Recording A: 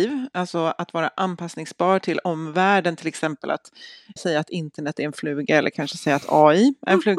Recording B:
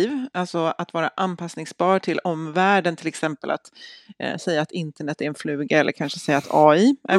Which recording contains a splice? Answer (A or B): A